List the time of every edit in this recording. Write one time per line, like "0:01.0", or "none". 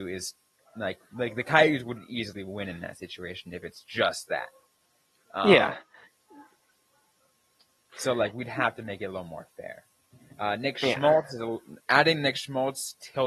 none